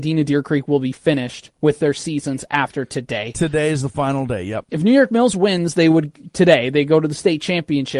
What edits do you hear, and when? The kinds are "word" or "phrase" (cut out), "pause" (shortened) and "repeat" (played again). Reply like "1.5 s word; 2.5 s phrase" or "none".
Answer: none